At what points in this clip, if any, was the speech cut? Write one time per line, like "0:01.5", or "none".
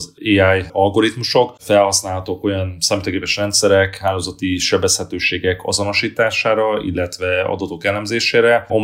none